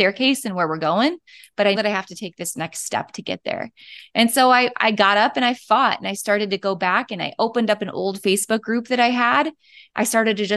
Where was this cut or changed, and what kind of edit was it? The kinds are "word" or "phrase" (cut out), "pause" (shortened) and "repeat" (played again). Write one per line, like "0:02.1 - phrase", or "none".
0:01.7 - word